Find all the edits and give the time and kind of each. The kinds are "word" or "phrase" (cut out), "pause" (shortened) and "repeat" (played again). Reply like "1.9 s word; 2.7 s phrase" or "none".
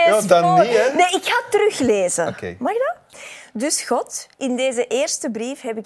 4.3 s pause